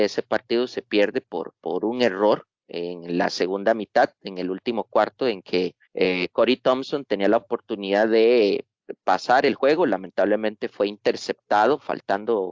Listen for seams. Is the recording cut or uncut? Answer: cut